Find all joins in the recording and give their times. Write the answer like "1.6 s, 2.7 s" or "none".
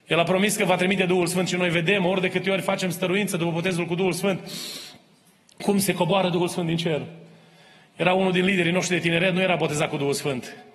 none